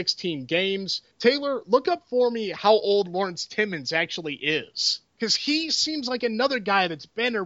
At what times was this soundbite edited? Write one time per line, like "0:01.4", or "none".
0:01.1
0:05.1